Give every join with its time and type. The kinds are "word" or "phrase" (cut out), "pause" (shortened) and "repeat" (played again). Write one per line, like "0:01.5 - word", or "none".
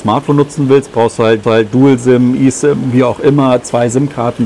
0:01.4 - repeat